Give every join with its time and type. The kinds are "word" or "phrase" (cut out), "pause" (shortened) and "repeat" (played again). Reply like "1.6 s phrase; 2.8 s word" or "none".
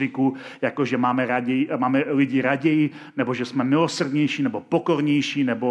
none